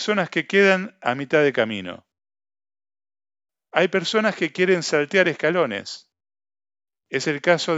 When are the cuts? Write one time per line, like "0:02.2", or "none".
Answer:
none